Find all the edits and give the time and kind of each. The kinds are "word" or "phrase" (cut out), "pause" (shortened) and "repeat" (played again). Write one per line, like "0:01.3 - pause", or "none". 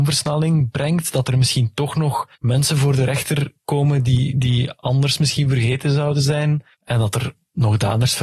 0:02.3 - pause
0:06.7 - pause

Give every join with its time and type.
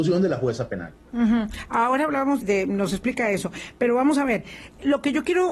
0:02.4 - word

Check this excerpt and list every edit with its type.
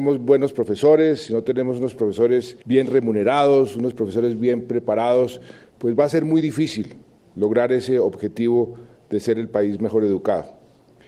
0:02.6 - pause

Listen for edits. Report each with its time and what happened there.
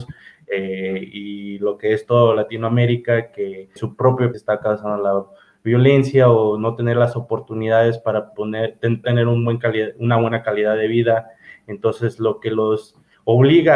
0:03.8 - word
0:04.3 - word
0:09.0 - word

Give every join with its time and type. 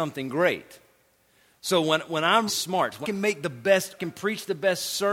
0:02.5 - word
0:03.0 - word
0:04.0 - phrase

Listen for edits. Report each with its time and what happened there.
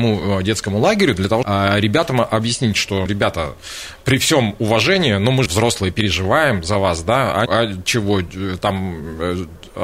0:01.4 - word
0:03.1 - word
0:05.5 - word
0:07.5 - phrase

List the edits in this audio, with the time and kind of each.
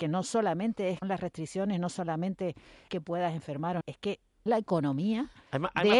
0:01.0 - word
0:02.9 - word
0:03.8 - word
0:04.5 - word

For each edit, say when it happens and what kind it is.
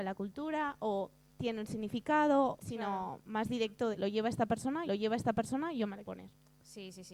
0:01.3 - pause
0:02.6 - word
0:03.9 - word
0:04.9 - repeat
0:06.1 - word

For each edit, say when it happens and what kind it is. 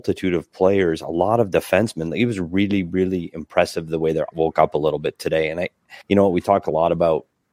0:04.3 - word
0:06.0 - pause

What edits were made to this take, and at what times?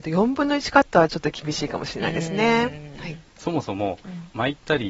0:03.3 - pause

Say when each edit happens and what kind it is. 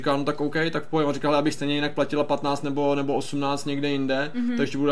none

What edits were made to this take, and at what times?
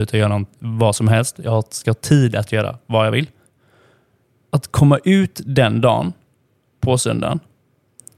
none

